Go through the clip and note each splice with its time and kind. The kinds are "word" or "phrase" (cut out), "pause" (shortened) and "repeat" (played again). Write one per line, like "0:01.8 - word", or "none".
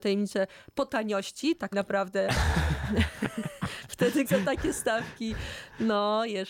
0:01.7 - word
0:04.2 - word